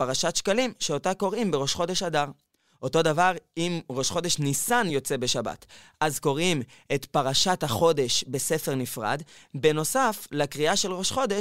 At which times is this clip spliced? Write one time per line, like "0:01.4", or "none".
none